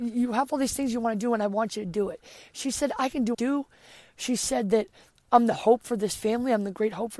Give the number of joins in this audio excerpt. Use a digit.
2